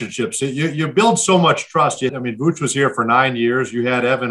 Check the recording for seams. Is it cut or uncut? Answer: cut